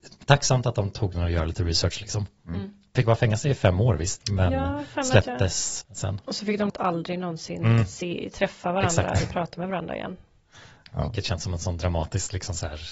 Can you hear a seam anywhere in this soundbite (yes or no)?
yes